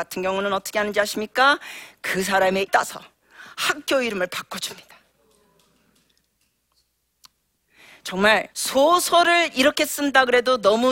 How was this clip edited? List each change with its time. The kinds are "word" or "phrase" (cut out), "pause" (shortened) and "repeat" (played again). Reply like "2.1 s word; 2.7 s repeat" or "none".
2.7 s word; 8.5 s pause